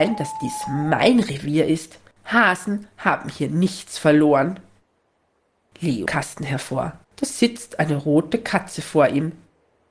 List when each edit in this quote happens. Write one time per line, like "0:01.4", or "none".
0:02.1
0:06.1
0:07.0